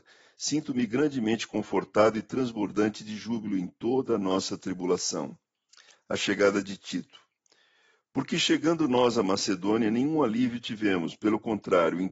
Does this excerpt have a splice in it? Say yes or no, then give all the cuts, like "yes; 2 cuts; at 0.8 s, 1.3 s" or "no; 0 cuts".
no; 0 cuts